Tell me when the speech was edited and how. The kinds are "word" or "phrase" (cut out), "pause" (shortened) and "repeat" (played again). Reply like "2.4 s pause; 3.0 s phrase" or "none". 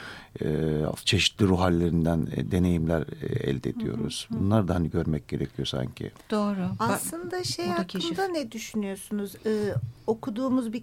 none